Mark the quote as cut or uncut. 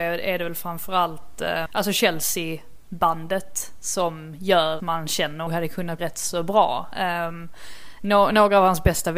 cut